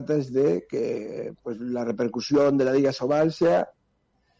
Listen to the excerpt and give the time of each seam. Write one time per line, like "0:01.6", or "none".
none